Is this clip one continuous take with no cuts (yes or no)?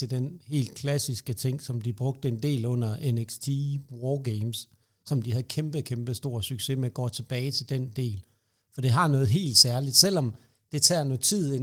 yes